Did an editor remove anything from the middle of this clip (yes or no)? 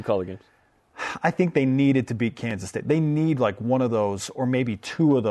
no